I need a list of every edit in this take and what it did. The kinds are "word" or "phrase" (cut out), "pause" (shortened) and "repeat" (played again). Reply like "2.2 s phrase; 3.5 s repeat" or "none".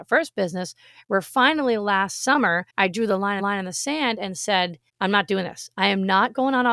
2.7 s pause; 3.4 s repeat; 4.9 s pause